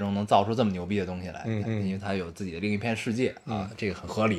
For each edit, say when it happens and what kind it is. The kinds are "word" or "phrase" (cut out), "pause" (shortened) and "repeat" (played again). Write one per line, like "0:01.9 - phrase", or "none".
0:01.6 - repeat